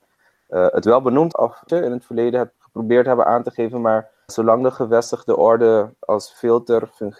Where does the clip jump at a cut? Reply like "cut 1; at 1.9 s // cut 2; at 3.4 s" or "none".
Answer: cut 1; at 1.3 s // cut 2; at 1.7 s // cut 3; at 2.6 s // cut 4; at 4.3 s